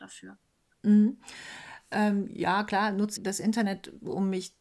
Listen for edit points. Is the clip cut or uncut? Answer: cut